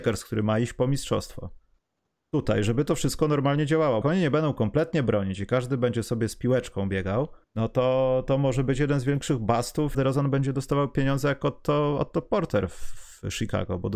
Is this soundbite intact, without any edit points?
no; 3 cuts; at 4.0 s, 7.4 s, 9.9 s

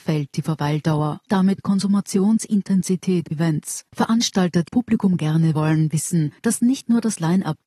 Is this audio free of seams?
no; 6 cuts; at 1.3 s, 3.3 s, 3.9 s, 4.7 s, 5.5 s, 6.4 s

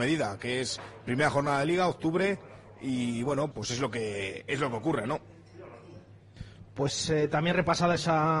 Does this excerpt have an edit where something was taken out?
yes; 1 cut; at 3.5 s

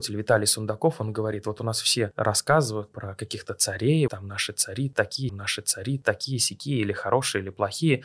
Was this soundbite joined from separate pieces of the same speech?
yes; 3 cuts; at 2.9 s, 4.1 s, 5.3 s

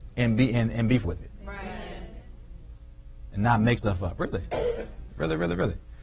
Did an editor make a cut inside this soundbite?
yes; 3 cuts; at 1.0 s, 3.8 s, 5.1 s

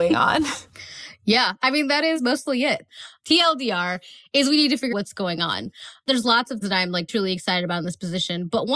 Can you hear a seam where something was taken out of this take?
yes; 3 cuts; at 4.9 s, 6.6 s, 7.1 s

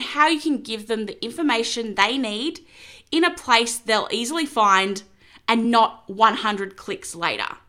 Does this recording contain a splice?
no; 0 cuts

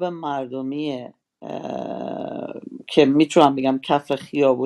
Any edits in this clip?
no; 0 cuts

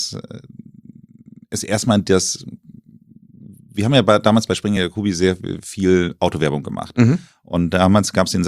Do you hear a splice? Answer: no; 0 cuts

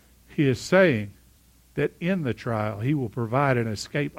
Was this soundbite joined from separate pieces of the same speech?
no; 0 cuts

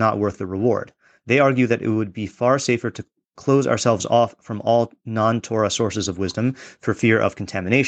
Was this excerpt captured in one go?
yes; 0 cuts

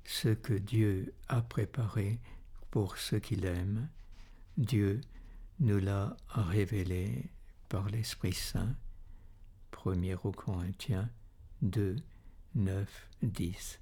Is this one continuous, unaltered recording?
yes; 0 cuts

